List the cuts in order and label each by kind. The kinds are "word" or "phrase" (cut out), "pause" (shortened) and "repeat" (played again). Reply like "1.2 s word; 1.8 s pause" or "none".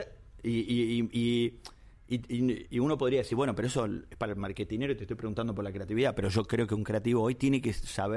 none